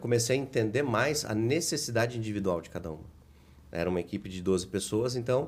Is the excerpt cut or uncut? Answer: uncut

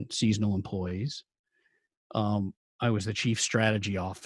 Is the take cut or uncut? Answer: uncut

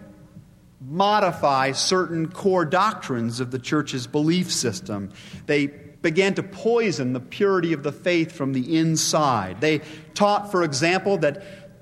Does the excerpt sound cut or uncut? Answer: cut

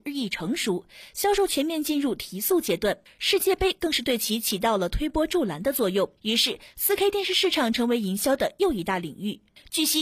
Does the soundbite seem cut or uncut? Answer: cut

